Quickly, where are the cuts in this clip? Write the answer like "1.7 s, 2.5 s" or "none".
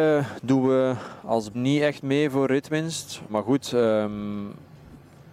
1.5 s, 3.3 s